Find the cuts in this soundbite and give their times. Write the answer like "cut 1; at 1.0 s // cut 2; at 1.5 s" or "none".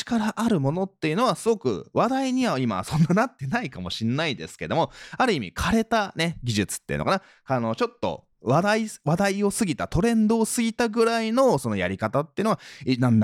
cut 1; at 8.3 s